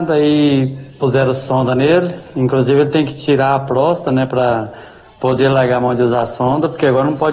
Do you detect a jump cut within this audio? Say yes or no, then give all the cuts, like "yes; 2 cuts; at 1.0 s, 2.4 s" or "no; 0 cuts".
no; 0 cuts